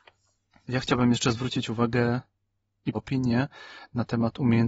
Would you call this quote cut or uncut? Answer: cut